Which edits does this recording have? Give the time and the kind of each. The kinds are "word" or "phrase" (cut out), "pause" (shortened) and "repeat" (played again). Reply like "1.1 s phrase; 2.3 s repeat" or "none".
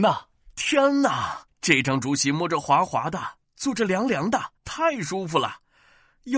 1.5 s pause; 4.6 s pause